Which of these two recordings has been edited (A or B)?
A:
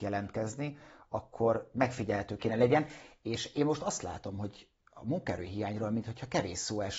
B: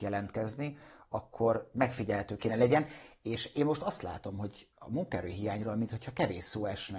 B